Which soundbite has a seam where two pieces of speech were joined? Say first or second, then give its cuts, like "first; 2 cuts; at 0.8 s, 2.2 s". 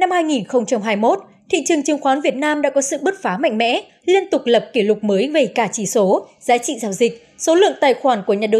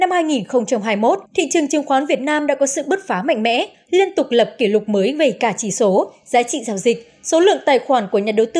second; 1 cut; at 1.3 s